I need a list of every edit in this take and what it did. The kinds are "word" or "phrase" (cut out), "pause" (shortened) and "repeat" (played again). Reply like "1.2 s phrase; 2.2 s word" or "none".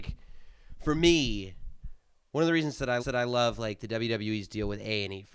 3.0 s repeat